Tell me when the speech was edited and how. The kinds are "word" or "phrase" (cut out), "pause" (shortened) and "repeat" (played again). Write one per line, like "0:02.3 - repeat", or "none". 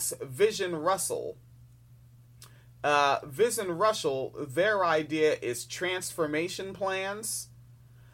none